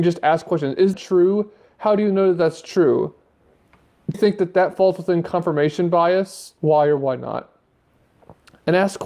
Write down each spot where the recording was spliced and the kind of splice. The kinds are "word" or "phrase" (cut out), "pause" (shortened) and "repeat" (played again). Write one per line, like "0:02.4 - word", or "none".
0:00.9 - word
0:04.1 - word
0:06.6 - pause

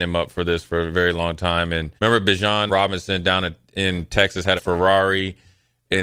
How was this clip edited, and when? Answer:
0:02.0 - pause
0:02.7 - phrase
0:04.6 - phrase

